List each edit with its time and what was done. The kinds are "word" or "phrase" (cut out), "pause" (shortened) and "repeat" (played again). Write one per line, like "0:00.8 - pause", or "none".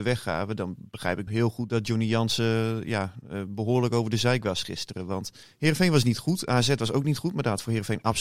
0:01.3 - word
0:05.4 - pause